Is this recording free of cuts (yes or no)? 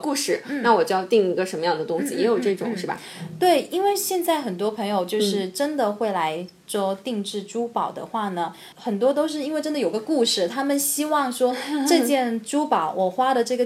no